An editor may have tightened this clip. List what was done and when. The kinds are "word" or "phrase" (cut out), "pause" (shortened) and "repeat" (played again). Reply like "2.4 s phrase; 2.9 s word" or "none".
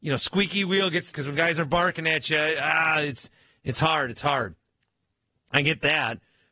1.1 s phrase